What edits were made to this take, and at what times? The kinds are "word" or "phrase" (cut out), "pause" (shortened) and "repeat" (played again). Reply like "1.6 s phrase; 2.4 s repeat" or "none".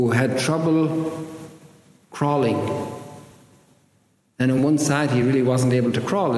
none